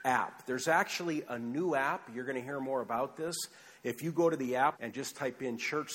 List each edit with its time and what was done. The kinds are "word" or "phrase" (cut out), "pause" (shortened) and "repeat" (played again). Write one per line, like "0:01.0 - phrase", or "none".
0:04.7 - word